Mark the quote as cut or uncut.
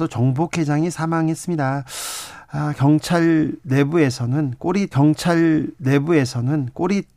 cut